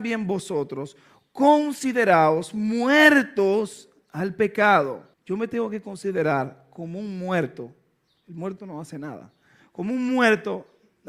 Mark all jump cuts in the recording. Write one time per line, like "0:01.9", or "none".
0:05.1